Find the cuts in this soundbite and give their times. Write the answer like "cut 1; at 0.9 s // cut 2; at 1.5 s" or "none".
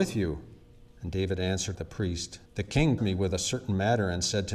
cut 1; at 0.9 s // cut 2; at 1.7 s // cut 3; at 2.5 s // cut 4; at 3.0 s